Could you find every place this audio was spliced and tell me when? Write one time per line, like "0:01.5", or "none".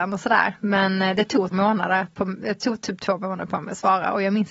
0:01.5